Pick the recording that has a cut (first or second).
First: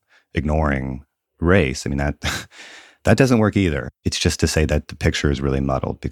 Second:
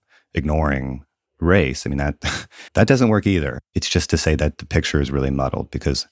second